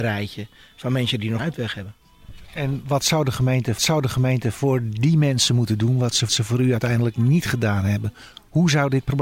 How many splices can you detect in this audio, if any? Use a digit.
3